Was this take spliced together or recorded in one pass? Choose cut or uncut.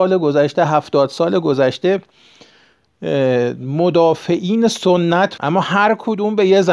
cut